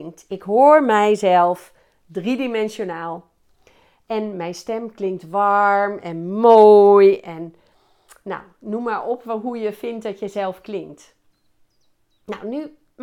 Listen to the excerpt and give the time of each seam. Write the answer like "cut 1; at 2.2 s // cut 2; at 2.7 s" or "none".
none